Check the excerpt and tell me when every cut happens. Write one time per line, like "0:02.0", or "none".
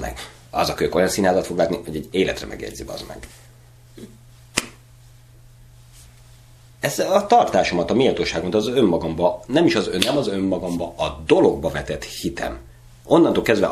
none